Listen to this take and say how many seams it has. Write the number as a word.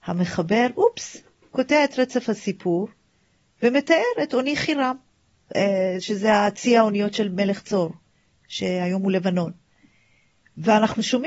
zero